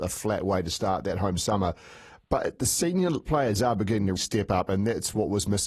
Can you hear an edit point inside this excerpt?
yes; 3 cuts; at 2.2 s, 3.3 s, 4.2 s

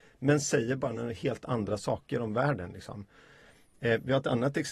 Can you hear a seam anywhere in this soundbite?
no; 0 cuts

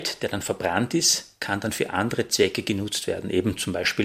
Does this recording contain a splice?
no; 0 cuts

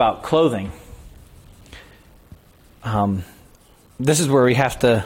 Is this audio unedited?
yes; 0 cuts

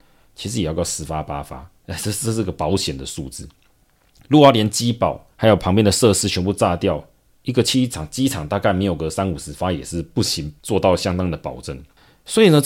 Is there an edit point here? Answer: yes; 3 cuts; at 1.8 s, 5.3 s, 10.6 s

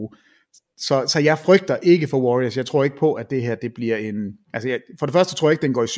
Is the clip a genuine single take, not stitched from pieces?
no; 1 cut; at 4.4 s

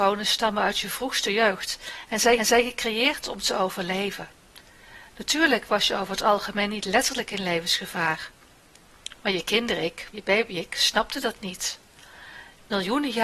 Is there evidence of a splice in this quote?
yes; 2 cuts; at 2.4 s, 10.1 s

